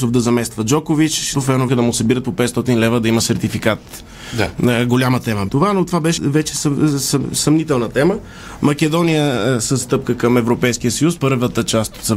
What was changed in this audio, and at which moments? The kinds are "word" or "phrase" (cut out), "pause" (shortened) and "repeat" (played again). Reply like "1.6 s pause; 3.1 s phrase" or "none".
1.3 s word; 1.7 s word; 5.5 s word; 6.2 s word; 9.8 s word; 11.2 s word